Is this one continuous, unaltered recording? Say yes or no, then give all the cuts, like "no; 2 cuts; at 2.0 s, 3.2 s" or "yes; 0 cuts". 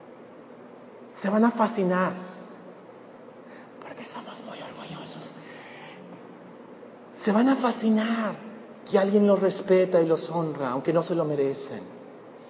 yes; 0 cuts